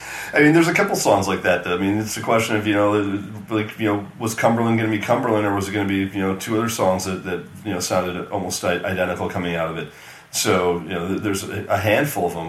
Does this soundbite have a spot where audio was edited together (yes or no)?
no